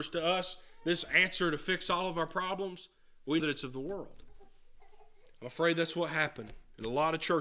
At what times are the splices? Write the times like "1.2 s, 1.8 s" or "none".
3.4 s

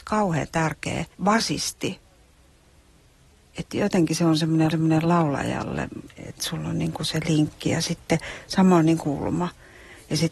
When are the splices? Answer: 1.1 s, 4.7 s, 9.0 s

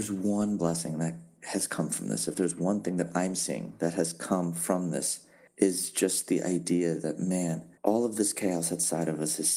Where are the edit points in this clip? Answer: 5.5 s, 7.8 s

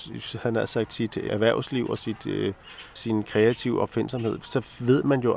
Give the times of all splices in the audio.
1.3 s, 3.0 s

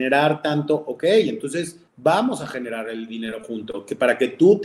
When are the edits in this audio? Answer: 1.9 s

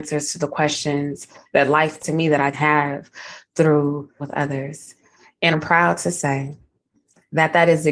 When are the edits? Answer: 2.0 s, 2.5 s, 4.2 s, 5.5 s

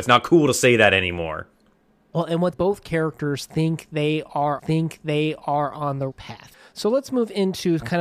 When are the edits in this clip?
2.5 s, 4.6 s, 6.1 s

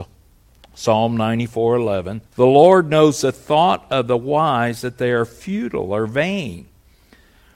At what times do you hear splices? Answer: 2.3 s

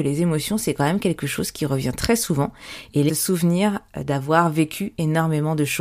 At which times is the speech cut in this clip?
3.1 s

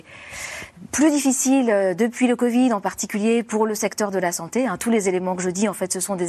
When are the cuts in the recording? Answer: none

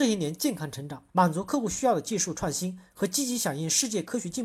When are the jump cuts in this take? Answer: 1.1 s

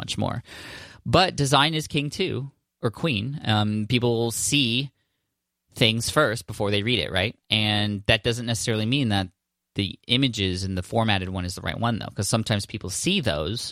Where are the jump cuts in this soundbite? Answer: 7.4 s

